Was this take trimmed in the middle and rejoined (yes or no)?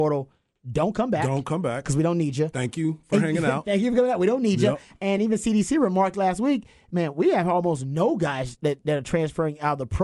no